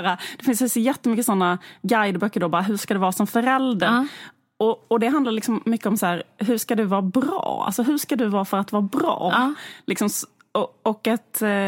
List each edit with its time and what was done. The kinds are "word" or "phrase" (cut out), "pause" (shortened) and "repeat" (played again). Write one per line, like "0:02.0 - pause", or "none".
none